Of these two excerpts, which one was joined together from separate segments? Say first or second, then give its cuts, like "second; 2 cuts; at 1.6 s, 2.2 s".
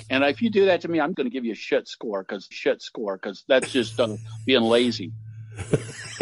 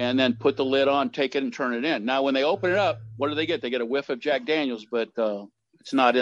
first; 2 cuts; at 1.1 s, 2.5 s